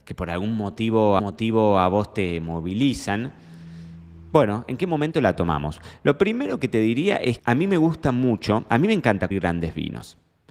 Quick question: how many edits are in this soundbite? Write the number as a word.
three